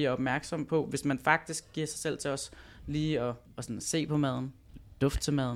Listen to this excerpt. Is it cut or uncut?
cut